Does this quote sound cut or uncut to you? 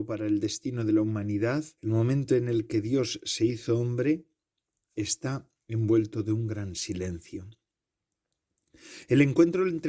cut